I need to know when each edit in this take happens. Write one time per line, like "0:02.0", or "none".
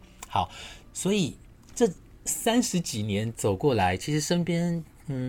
none